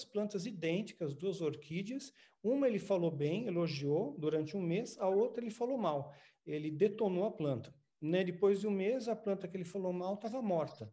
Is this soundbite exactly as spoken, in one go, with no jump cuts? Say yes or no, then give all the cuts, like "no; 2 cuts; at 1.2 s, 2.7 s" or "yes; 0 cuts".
yes; 0 cuts